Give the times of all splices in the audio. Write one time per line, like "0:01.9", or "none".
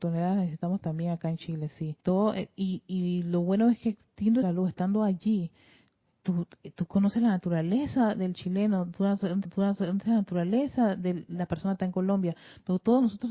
0:02.0
0:04.4
0:09.4